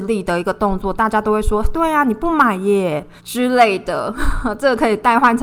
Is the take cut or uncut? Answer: cut